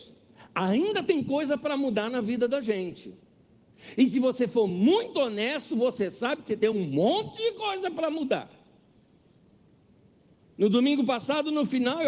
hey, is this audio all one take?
yes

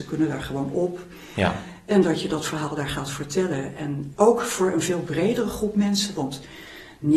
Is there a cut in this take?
yes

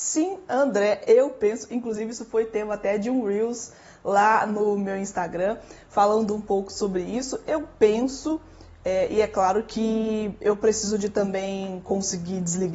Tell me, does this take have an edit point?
no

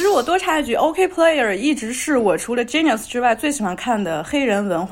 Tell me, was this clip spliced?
no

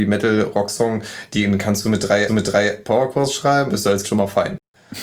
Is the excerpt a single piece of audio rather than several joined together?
no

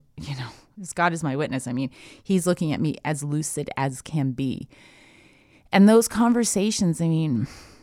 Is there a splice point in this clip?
no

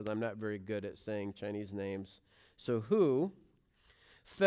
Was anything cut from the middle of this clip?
no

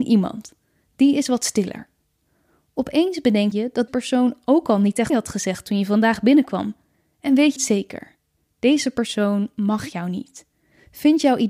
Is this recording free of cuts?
no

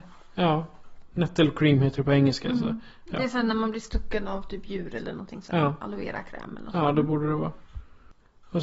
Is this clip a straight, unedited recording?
yes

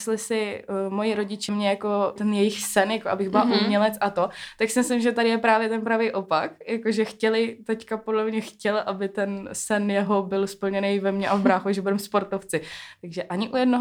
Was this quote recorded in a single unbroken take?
no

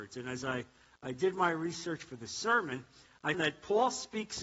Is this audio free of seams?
no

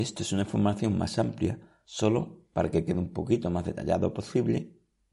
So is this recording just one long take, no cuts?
yes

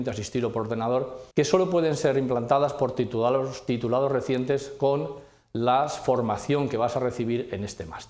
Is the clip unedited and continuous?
no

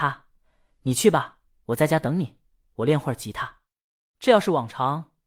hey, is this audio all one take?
yes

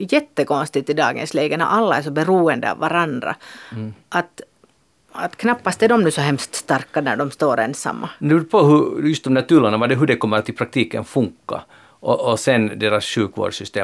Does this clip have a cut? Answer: no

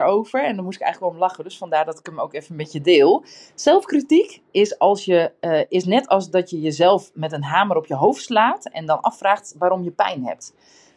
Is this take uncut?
yes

